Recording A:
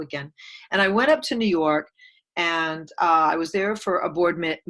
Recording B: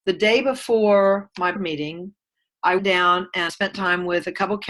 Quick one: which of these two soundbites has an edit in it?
B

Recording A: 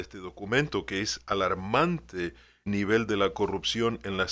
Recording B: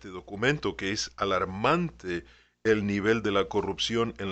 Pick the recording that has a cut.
A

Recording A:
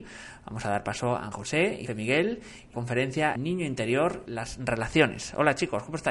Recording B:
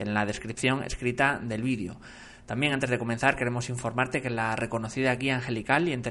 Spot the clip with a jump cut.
A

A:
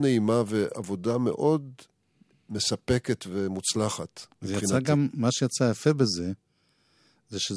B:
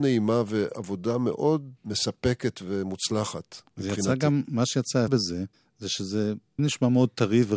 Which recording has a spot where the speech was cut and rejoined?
B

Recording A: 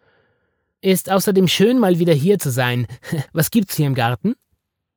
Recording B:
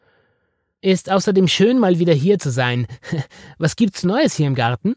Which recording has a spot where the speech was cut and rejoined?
A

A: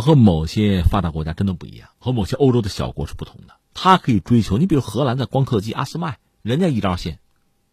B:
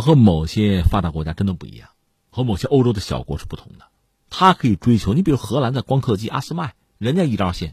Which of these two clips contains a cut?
A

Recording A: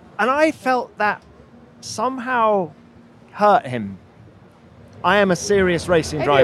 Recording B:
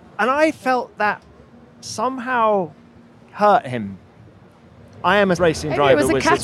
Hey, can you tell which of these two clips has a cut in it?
B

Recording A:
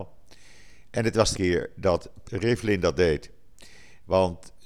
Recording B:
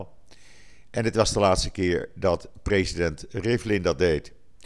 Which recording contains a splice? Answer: A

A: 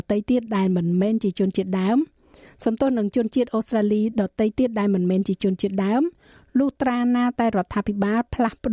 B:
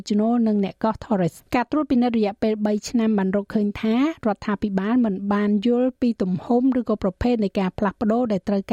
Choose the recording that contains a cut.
B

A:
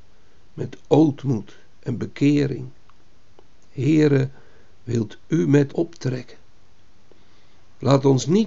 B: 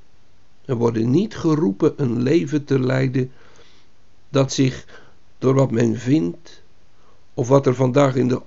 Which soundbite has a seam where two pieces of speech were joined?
A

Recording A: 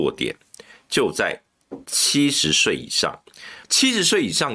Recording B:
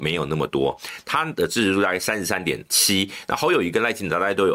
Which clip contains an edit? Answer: A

